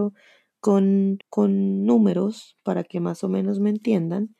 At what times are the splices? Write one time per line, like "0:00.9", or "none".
0:01.2